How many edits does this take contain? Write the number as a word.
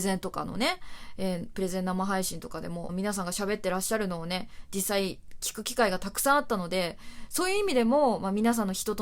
one